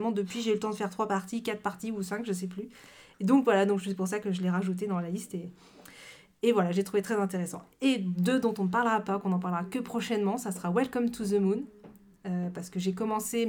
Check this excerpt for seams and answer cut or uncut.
uncut